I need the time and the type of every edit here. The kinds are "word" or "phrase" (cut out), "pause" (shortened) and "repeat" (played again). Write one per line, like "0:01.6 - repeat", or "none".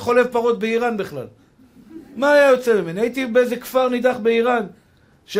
none